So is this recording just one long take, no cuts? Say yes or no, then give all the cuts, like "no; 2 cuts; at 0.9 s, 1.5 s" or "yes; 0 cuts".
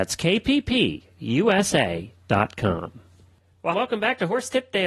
no; 1 cut; at 3.7 s